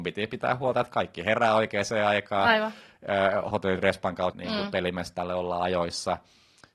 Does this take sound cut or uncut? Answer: cut